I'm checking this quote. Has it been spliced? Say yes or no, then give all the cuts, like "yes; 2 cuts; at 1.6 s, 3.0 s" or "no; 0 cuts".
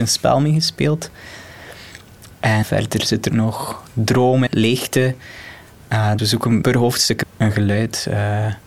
yes; 6 cuts; at 2.6 s, 3.3 s, 4.5 s, 6.2 s, 6.6 s, 7.2 s